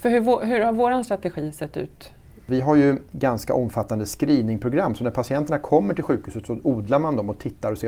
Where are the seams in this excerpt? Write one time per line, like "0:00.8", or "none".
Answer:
none